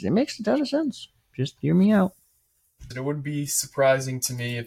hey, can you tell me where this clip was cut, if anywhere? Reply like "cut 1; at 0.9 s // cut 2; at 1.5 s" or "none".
cut 1; at 2.9 s